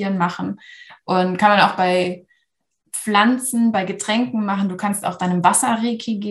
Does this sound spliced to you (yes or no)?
no